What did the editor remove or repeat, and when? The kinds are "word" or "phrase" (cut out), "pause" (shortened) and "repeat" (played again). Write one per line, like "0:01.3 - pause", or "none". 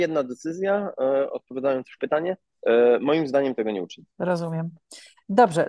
0:02.0 - phrase
0:04.1 - pause

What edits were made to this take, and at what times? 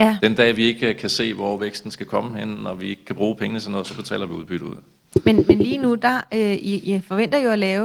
none

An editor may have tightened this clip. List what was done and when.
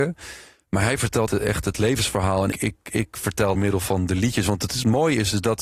0:01.3 - word
0:02.5 - word
0:03.5 - phrase

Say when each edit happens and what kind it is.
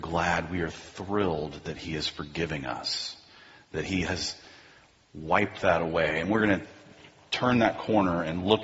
none

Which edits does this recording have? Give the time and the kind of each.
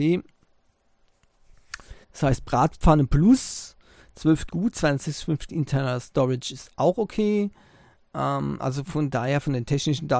0:02.0 - pause
0:04.5 - phrase
0:05.5 - word

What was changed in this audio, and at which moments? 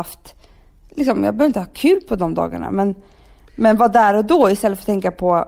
none

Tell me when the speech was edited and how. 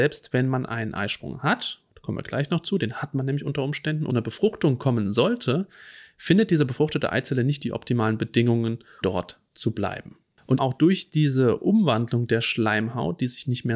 0:04.1 - phrase
0:09.0 - word
0:10.6 - word

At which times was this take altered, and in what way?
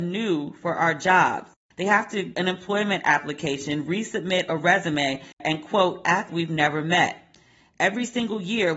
0:02.3 - word
0:06.3 - word

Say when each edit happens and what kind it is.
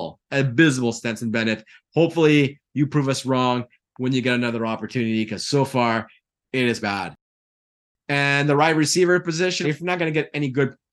0:06.8 - word
0:09.6 - word

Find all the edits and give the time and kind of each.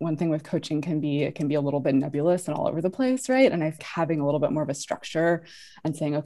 0:03.8 - word

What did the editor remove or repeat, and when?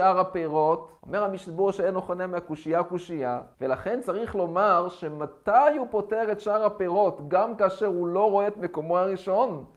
0:01.0 - pause
0:03.5 - pause

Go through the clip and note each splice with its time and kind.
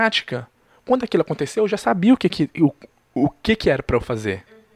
none

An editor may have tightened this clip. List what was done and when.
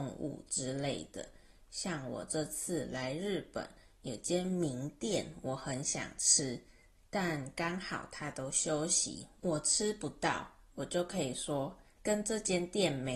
0:12.0 - word

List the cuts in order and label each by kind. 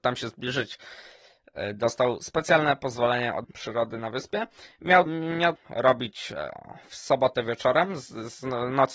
0:03.4 - word
0:05.1 - word
0:05.6 - word

